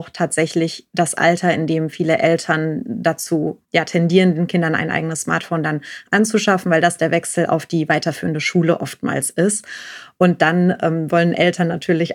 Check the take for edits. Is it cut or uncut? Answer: cut